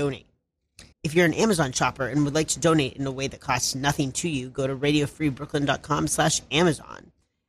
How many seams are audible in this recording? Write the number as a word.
one